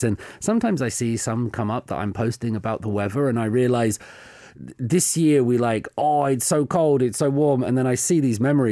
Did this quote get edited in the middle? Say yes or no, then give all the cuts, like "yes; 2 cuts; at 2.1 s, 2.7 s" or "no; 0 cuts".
no; 0 cuts